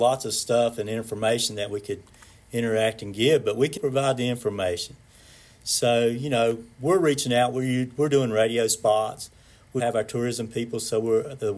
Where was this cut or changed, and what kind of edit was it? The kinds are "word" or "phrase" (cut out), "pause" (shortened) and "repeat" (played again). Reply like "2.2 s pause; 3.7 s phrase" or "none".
3.8 s word; 9.8 s word